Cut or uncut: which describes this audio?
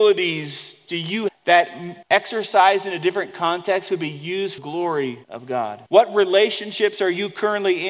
cut